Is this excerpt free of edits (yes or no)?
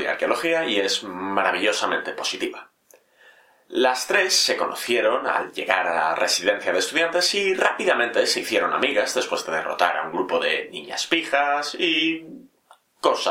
yes